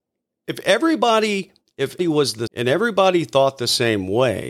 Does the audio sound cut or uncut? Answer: cut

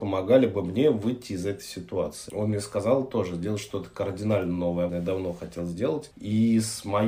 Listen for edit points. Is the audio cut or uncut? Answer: cut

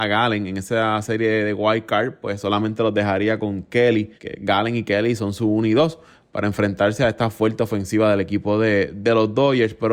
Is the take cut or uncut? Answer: cut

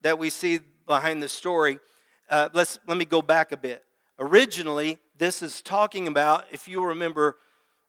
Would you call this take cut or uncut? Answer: uncut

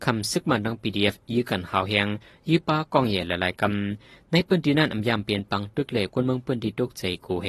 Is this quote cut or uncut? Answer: uncut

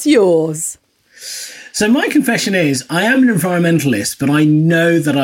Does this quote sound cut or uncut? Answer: uncut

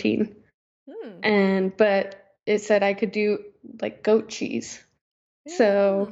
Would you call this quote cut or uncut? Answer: uncut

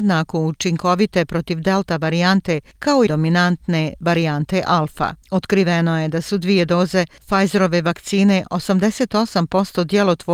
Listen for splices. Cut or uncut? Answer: cut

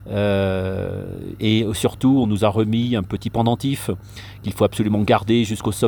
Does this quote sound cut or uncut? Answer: uncut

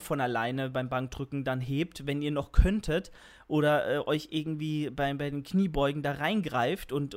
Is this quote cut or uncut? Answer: uncut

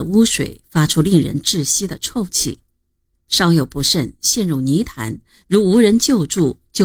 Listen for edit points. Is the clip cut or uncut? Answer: uncut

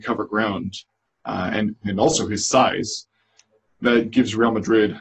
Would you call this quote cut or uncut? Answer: uncut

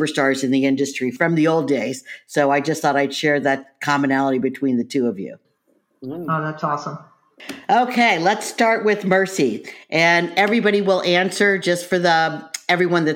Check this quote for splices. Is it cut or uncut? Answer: uncut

